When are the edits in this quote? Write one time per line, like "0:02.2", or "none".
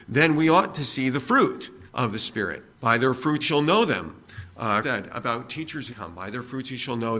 0:01.9
0:02.7
0:03.4
0:04.8
0:05.9